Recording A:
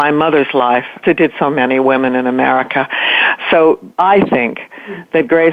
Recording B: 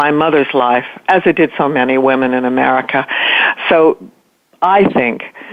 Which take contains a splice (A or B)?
A